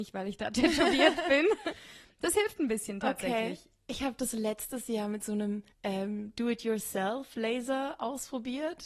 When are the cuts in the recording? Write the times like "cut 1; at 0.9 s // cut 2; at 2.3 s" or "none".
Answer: cut 1; at 5.7 s